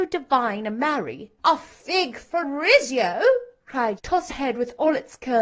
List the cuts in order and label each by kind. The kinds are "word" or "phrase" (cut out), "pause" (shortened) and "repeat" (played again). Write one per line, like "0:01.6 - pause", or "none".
0:01.4 - pause
0:02.4 - word
0:04.0 - word
0:04.3 - word